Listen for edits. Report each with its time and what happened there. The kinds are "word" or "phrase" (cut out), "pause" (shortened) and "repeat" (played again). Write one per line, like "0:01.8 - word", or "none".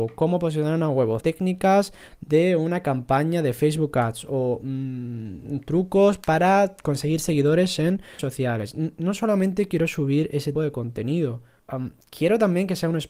0:01.2 - word
0:08.2 - word
0:10.5 - word
0:11.6 - pause